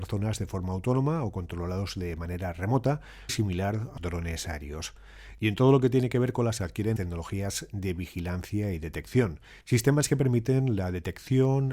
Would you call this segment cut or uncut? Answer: cut